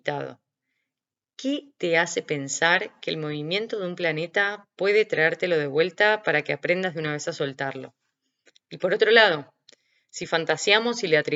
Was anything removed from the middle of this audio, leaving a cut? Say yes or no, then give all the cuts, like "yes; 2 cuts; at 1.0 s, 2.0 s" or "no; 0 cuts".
no; 0 cuts